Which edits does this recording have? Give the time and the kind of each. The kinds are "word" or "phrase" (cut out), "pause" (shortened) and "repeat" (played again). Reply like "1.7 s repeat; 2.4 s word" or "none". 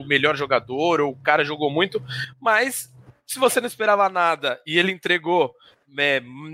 none